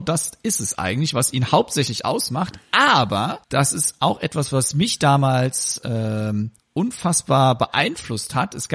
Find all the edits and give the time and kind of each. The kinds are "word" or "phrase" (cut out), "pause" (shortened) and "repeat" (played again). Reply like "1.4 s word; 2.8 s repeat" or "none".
3.4 s pause; 6.6 s pause